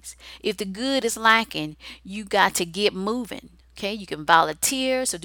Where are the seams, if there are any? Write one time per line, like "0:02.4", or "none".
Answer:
none